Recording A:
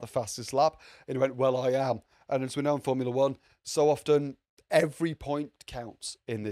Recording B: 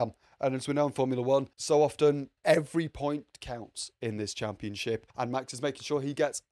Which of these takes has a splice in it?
B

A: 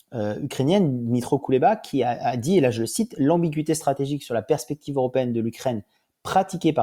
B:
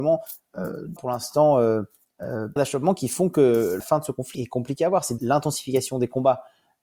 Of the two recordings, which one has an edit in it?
B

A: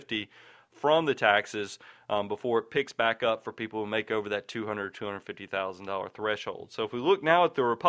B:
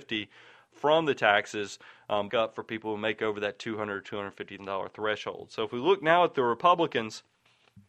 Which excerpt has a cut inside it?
B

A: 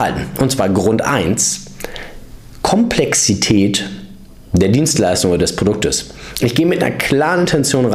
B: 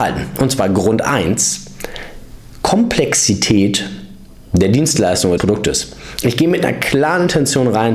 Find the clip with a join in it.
B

